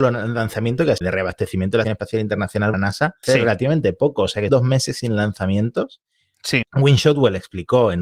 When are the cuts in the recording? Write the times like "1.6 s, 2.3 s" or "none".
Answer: 1.0 s, 1.8 s, 2.7 s, 3.2 s, 4.5 s